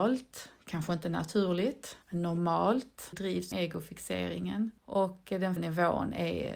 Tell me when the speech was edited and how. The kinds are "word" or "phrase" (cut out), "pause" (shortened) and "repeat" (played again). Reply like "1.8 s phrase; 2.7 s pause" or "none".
2.0 s pause; 3.1 s phrase; 3.5 s word; 4.8 s pause; 5.6 s word